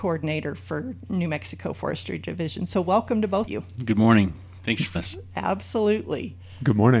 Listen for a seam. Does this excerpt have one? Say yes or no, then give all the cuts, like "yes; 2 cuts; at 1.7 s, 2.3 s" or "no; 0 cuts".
yes; 2 cuts; at 3.5 s, 5.0 s